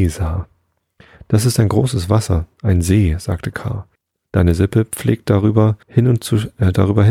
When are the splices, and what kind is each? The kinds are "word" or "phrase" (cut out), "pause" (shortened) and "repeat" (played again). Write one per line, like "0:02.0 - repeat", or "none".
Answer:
0:04.0 - pause
0:05.8 - pause